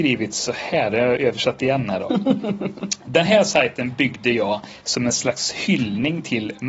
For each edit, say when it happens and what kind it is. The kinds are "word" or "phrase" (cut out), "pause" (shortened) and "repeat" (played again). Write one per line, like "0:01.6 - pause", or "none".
none